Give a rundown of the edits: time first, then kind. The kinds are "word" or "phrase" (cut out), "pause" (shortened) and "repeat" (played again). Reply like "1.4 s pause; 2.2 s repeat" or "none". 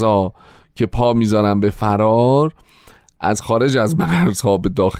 none